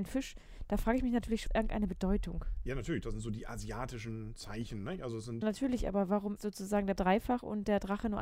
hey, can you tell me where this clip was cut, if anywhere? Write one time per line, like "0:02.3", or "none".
0:01.5
0:05.4
0:06.4
0:06.9